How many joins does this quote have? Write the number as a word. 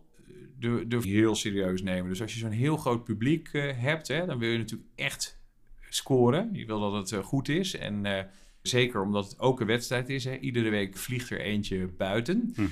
three